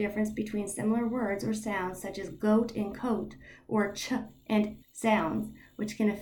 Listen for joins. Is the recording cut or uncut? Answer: cut